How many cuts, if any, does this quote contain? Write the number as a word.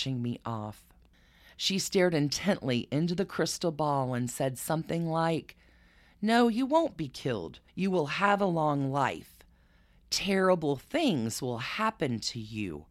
one